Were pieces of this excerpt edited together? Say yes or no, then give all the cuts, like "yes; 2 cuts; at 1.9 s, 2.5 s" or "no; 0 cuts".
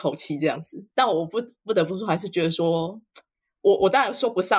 yes; 1 cut; at 0.9 s